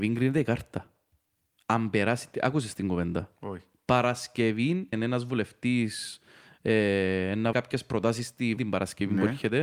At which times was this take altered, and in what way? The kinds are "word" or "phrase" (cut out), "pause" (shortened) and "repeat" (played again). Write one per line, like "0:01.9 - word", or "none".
0:04.9 - word
0:07.5 - word
0:08.6 - word